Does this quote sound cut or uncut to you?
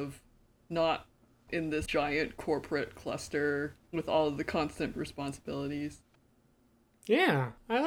cut